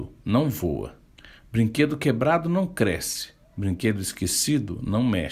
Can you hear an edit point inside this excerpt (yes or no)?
yes